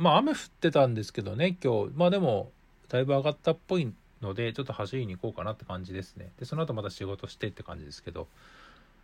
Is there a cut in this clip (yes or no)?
no